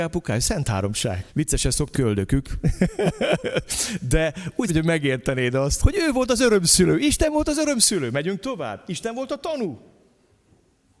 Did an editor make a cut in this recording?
yes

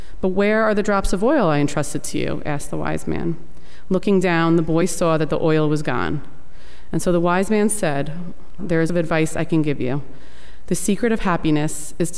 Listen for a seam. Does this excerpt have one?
yes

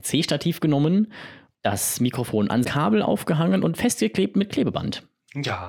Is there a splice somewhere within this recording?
yes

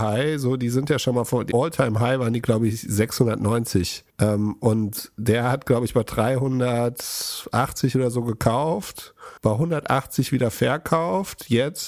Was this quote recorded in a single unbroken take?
no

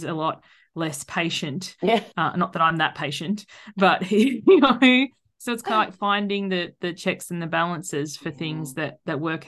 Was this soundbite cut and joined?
no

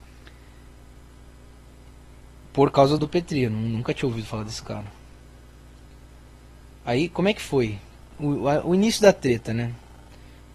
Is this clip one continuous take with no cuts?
no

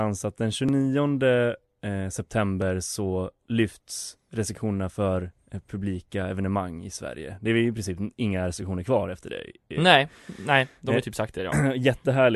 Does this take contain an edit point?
no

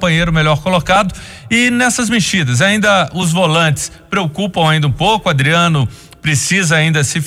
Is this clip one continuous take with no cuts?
yes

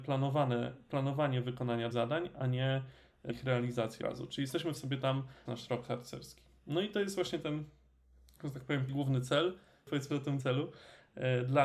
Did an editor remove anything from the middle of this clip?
yes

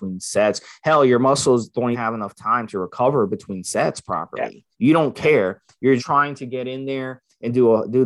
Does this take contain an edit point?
yes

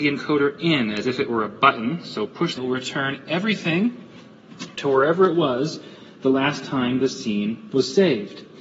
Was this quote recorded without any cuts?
no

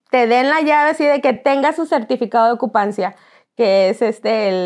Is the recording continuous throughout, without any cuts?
yes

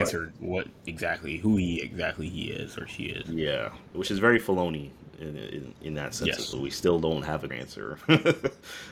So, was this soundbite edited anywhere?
yes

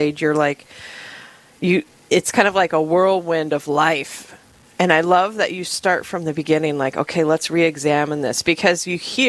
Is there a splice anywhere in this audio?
no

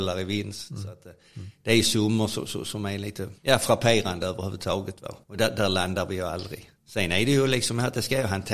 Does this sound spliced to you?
yes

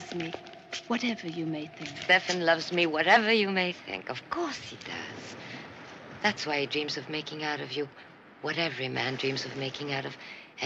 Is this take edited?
no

